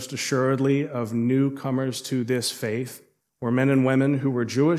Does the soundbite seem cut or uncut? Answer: cut